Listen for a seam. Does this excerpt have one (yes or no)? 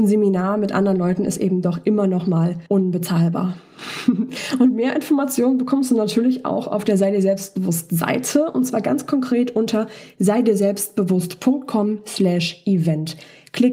yes